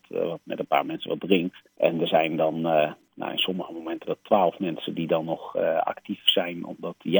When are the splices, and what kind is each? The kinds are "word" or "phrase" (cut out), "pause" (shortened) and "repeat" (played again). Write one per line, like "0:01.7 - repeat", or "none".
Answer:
0:01.7 - pause
0:04.0 - word

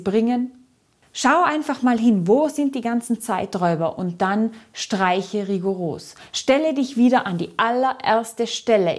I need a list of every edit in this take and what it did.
none

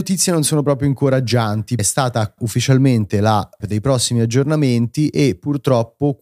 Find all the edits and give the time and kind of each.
0:01.8 - word
0:02.4 - word
0:03.6 - word

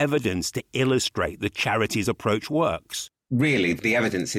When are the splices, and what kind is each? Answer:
none

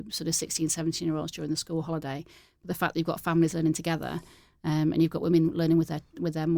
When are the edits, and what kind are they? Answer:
none

